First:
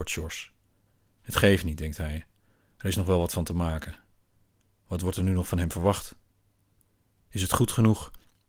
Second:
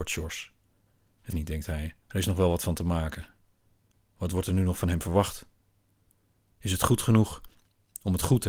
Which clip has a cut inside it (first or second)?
second